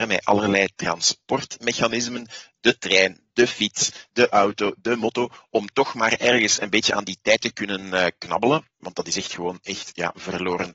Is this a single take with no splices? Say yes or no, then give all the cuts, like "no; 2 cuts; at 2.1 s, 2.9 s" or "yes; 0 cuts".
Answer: yes; 0 cuts